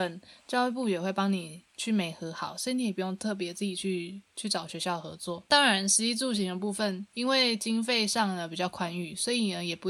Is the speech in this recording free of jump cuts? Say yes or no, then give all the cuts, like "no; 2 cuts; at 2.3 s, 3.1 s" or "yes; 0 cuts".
no; 1 cut; at 1.7 s